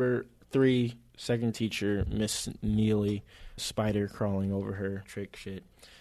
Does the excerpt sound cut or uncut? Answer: cut